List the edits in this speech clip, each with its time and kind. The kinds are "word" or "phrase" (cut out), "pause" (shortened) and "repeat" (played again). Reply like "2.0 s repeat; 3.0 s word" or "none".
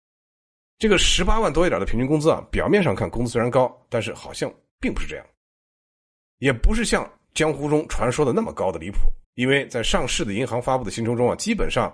9.2 s pause